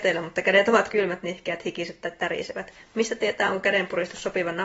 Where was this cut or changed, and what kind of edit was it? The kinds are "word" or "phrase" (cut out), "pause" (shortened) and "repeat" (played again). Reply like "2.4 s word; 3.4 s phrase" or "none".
none